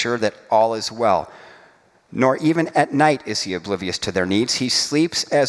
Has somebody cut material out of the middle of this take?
no; 0 cuts

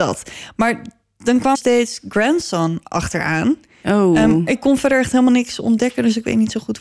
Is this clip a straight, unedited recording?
no; 2 cuts; at 1.5 s, 4.5 s

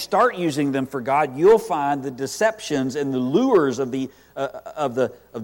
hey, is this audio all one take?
yes; 0 cuts

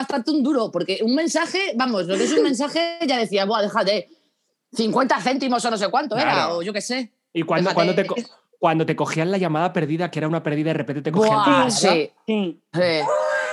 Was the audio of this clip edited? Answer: no; 0 cuts

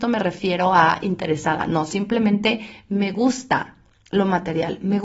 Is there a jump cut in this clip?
no; 0 cuts

